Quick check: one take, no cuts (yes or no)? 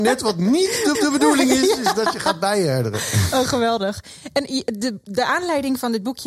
no